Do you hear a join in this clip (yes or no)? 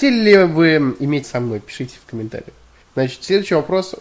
yes